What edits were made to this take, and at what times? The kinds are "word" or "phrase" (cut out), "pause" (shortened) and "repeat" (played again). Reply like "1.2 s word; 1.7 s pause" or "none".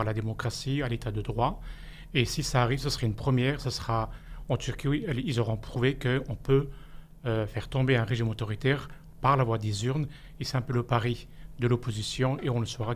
none